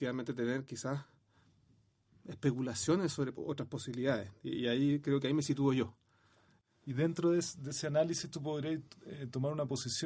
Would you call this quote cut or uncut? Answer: uncut